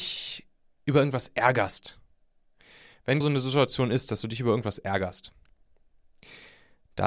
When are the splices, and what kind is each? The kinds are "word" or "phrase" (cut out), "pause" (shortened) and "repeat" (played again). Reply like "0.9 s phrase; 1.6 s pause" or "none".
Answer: 3.2 s word